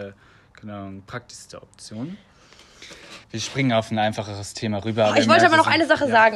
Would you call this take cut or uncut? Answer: cut